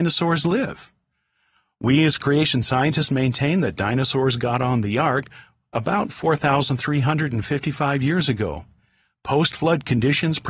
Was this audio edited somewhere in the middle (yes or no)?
no